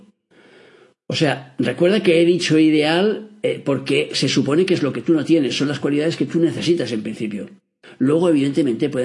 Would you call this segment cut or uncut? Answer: uncut